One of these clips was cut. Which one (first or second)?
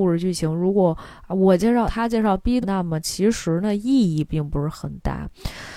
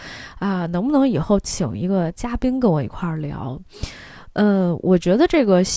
first